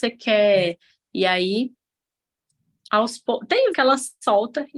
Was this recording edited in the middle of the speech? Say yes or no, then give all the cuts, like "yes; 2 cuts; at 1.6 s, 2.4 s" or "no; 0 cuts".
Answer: yes; 1 cut; at 3.7 s